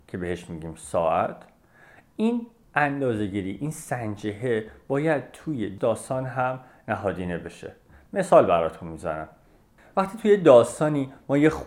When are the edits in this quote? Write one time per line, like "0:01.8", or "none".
none